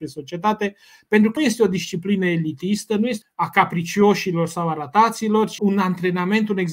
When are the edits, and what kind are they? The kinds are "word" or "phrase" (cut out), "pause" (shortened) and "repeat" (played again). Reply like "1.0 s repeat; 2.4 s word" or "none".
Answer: 1.4 s word; 3.2 s phrase; 5.6 s word